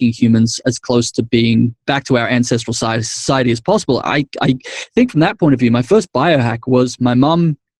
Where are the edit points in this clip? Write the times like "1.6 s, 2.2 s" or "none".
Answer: 1.8 s